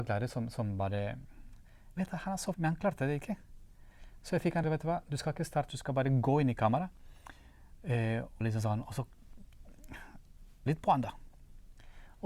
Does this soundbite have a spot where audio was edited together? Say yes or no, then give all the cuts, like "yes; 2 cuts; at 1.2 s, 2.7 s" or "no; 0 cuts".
yes; 6 cuts; at 2.0 s, 2.5 s, 4.6 s, 5.7 s, 8.4 s, 10.7 s